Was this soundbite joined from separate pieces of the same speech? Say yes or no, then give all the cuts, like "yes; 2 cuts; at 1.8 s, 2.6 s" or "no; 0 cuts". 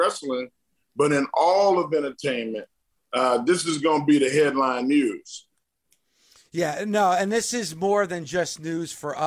no; 0 cuts